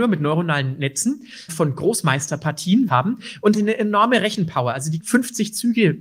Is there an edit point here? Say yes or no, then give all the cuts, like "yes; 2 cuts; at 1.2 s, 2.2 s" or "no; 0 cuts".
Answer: yes; 4 cuts; at 1.5 s, 2.9 s, 3.5 s, 5.0 s